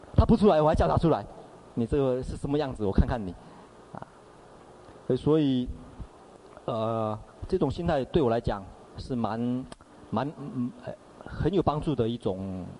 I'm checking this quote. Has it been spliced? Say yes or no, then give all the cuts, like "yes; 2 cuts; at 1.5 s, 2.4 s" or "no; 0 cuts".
yes; 1 cut; at 8.9 s